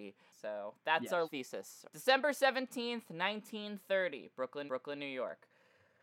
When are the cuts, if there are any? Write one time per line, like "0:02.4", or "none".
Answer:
0:01.2
0:04.7